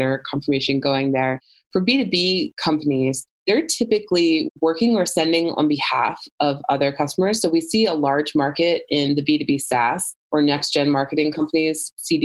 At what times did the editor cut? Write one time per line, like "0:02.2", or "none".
none